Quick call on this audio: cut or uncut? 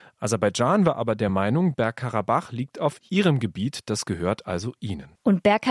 uncut